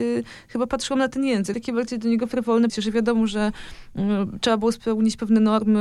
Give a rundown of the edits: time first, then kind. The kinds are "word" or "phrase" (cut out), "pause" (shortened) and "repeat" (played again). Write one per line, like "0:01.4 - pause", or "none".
0:01.5 - phrase
0:02.7 - word